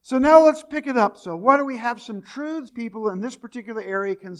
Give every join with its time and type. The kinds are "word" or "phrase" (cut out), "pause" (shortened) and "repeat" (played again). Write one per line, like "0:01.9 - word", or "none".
0:02.7 - phrase